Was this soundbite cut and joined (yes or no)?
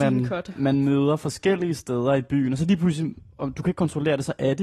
no